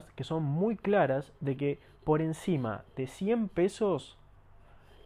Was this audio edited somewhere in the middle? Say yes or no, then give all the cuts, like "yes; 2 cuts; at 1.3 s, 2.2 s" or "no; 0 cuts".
no; 0 cuts